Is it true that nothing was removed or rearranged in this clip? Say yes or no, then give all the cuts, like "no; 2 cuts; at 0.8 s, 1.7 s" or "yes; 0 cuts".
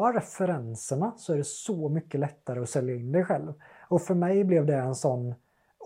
yes; 0 cuts